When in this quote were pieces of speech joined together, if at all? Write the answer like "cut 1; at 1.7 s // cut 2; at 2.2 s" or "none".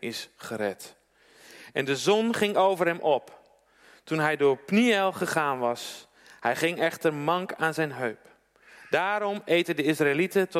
none